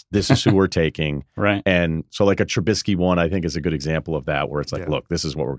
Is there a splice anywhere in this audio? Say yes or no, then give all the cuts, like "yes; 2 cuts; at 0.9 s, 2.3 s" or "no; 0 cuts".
no; 0 cuts